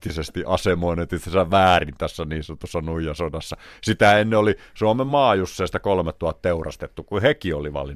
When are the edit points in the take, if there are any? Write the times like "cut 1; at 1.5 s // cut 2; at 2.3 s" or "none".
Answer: none